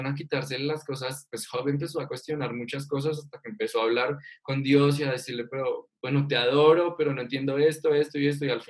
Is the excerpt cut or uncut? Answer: cut